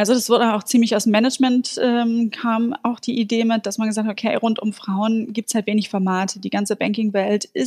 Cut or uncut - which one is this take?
uncut